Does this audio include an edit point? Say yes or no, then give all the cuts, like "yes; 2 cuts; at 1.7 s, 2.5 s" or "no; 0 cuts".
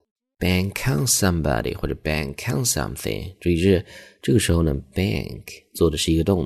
no; 0 cuts